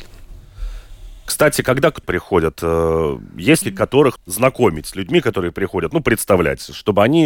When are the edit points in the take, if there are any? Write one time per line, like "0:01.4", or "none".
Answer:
0:02.0
0:03.6
0:04.2